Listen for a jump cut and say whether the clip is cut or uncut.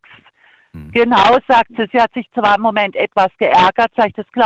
uncut